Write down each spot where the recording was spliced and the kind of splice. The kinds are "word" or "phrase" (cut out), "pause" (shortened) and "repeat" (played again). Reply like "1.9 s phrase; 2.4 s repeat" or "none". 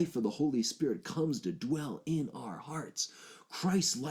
none